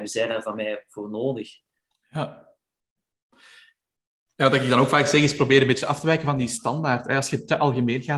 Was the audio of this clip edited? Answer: no; 0 cuts

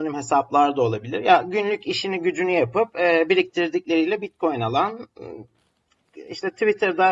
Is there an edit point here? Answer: no; 0 cuts

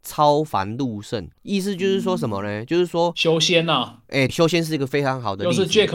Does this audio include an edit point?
yes; 2 cuts; at 1.4 s, 4.3 s

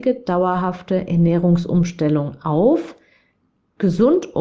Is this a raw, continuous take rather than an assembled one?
yes; 0 cuts

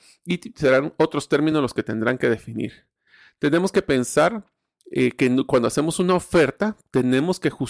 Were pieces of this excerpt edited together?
no; 0 cuts

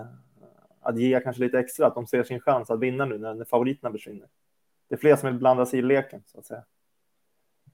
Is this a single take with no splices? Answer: yes; 0 cuts

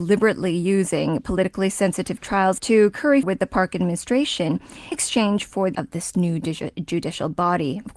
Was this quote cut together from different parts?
yes; 4 cuts; at 2.6 s, 3.2 s, 4.9 s, 5.7 s

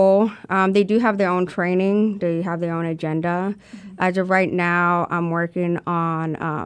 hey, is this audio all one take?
yes; 0 cuts

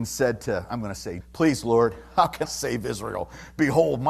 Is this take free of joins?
no; 2 cuts; at 1.2 s, 2.4 s

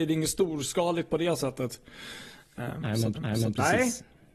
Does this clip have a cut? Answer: yes; 2 cuts; at 2.6 s, 3.1 s

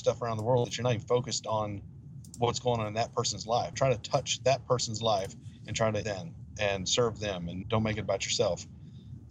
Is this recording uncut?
no; 3 cuts; at 3.7 s, 6.0 s, 7.6 s

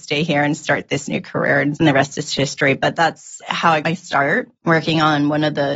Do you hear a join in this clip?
yes; 3 cuts; at 1.8 s, 3.8 s, 4.6 s

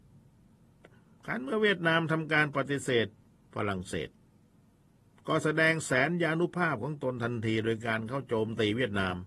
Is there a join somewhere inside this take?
no; 0 cuts

